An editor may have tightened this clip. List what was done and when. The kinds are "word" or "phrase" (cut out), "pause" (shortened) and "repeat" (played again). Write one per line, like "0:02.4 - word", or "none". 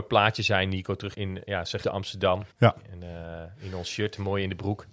0:01.1 - word
0:01.8 - word
0:02.5 - pause